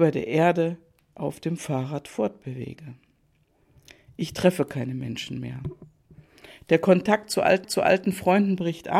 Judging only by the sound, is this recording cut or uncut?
cut